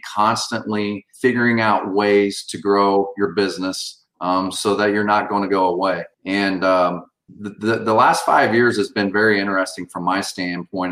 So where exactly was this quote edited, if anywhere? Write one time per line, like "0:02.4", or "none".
0:01.1
0:06.1
0:07.3